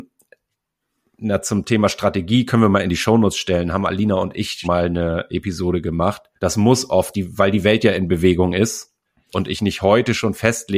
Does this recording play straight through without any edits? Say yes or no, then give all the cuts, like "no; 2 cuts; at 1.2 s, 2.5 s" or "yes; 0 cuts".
no; 4 cuts; at 4.6 s, 6.4 s, 7.1 s, 9.0 s